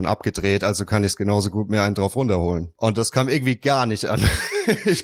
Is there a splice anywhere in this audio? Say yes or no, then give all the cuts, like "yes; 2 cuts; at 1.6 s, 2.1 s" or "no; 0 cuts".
no; 0 cuts